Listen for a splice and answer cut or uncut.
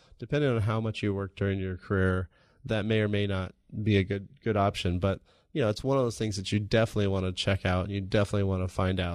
uncut